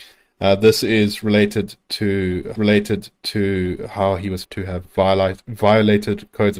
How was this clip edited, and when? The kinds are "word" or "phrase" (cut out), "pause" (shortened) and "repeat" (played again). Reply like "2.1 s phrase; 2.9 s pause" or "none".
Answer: 2.5 s repeat; 4.4 s word; 4.8 s word